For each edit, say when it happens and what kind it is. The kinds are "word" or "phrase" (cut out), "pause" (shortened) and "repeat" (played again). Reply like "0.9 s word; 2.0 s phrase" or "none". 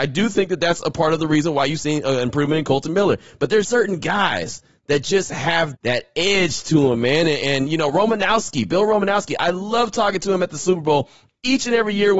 3.6 s word; 5.7 s word